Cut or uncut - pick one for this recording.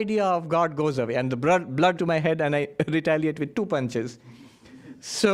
cut